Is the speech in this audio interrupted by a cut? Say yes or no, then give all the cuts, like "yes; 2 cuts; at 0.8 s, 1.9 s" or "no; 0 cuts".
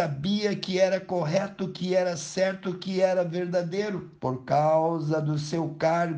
yes; 1 cut; at 4.2 s